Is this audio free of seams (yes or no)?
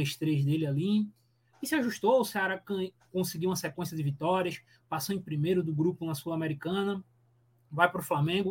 yes